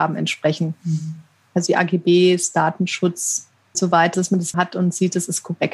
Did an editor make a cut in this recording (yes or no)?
yes